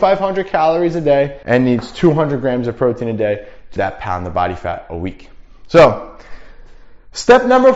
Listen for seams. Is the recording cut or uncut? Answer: cut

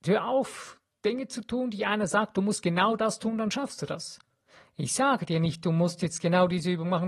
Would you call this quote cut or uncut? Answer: uncut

